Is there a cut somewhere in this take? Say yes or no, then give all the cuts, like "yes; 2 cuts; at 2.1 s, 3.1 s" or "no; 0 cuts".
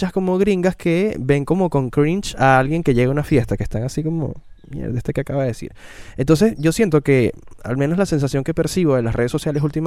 yes; 1 cut; at 4.6 s